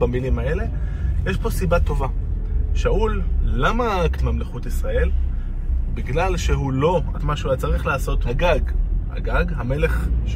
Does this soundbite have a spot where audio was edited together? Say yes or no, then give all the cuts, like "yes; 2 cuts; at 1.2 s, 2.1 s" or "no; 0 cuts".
yes; 3 cuts; at 4.1 s, 7.1 s, 8.2 s